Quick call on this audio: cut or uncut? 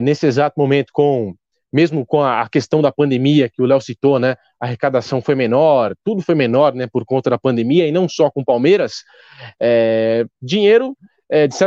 uncut